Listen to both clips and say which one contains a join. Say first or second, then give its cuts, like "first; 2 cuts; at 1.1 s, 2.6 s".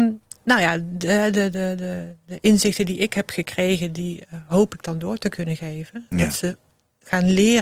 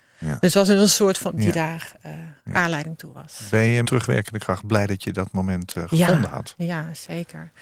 second; 3 cuts; at 1.3 s, 2.4 s, 3.8 s